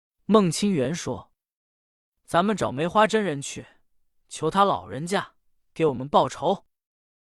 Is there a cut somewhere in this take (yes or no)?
no